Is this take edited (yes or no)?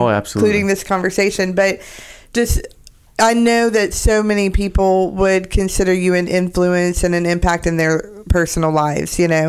no